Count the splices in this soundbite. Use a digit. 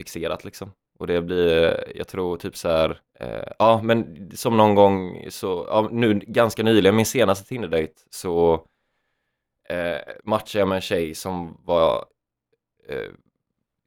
2